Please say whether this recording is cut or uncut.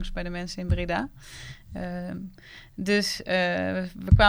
uncut